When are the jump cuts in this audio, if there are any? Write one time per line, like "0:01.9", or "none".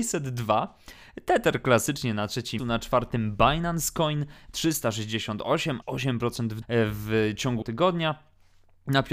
0:02.6
0:05.8
0:06.6
0:07.6